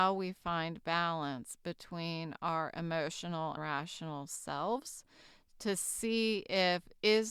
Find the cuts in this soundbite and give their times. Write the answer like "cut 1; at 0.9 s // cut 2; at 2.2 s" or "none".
cut 1; at 3.6 s